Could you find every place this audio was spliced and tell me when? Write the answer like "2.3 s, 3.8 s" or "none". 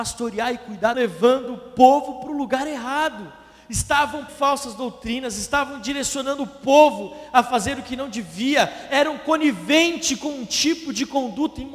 0.9 s, 4.3 s